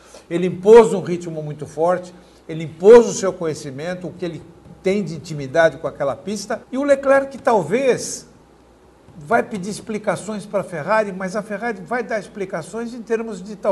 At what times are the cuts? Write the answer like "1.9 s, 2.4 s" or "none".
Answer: 6.6 s